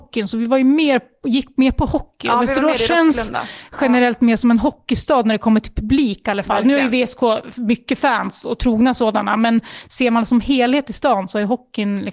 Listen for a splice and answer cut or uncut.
uncut